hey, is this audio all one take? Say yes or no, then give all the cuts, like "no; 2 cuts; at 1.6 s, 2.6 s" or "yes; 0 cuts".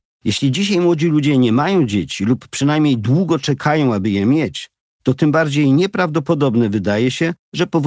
yes; 0 cuts